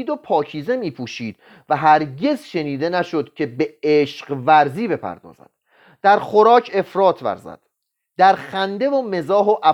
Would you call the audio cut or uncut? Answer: uncut